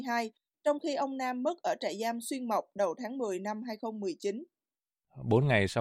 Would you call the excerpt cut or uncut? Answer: uncut